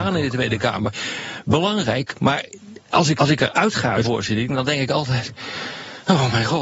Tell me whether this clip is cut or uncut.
cut